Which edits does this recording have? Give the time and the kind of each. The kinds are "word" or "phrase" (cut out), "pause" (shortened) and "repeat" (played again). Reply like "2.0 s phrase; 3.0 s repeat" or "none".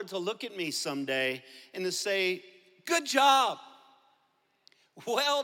none